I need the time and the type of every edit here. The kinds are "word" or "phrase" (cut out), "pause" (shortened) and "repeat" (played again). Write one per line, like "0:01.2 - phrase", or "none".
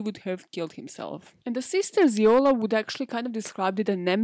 0:01.4 - pause